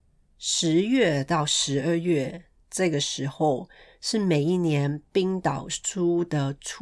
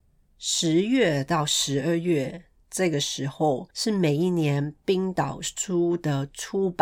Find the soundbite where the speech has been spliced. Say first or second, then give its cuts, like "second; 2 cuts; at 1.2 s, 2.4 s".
second; 1 cut; at 3.7 s